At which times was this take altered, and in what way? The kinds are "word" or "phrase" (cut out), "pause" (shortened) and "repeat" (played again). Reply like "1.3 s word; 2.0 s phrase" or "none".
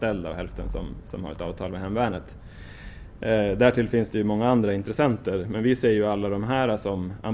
none